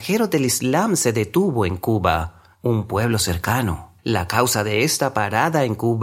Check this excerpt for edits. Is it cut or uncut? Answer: cut